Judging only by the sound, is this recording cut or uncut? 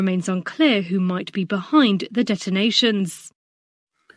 uncut